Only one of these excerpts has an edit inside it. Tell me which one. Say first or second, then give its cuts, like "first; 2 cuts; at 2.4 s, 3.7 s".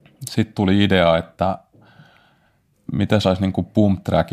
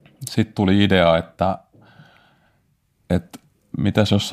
first; 2 cuts; at 2.7 s, 3.2 s